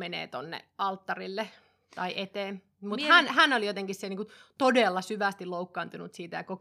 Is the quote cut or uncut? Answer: uncut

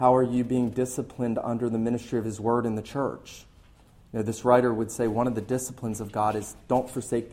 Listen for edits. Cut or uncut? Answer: uncut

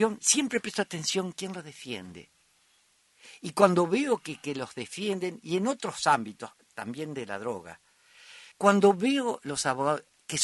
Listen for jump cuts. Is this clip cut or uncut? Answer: cut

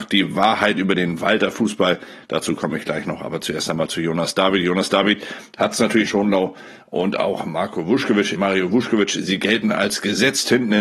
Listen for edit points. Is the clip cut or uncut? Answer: cut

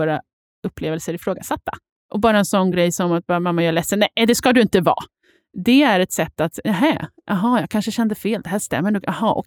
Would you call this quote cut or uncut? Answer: uncut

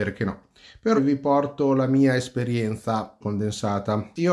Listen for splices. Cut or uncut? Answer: cut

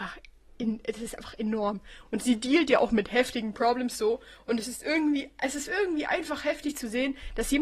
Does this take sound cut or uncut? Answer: uncut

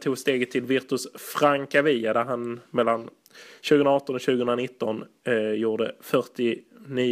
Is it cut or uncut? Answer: uncut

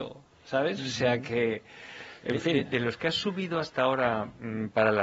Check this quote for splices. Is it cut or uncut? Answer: uncut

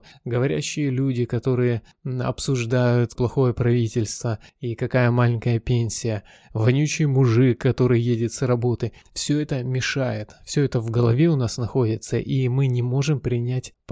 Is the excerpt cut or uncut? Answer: cut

